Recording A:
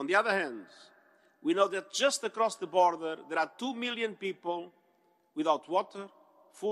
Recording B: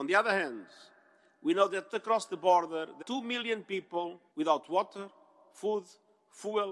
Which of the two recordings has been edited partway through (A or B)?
B